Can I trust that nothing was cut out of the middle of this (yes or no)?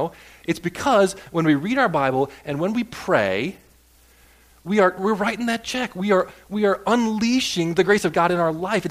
yes